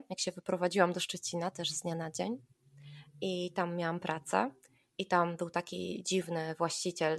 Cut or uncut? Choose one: uncut